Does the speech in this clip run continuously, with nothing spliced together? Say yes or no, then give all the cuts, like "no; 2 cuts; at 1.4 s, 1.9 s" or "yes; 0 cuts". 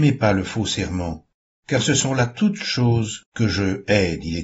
yes; 0 cuts